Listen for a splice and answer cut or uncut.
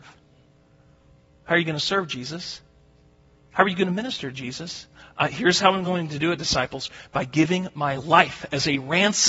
uncut